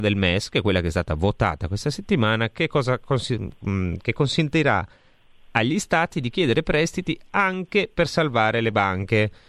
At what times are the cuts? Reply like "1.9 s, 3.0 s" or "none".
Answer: none